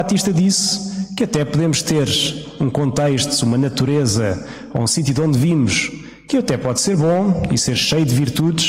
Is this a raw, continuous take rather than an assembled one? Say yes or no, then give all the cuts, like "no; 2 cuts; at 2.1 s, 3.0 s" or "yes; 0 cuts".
yes; 0 cuts